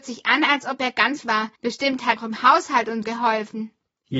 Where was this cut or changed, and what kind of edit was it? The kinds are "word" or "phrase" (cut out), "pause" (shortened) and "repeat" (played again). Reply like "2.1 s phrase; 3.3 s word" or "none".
1.2 s word; 1.6 s pause; 2.2 s word; 3.0 s word